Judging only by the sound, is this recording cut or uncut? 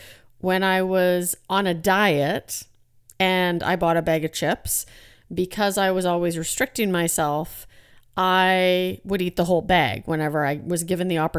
uncut